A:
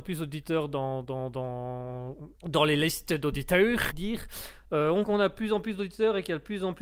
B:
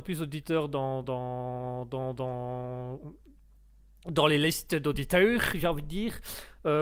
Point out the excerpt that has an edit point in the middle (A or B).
A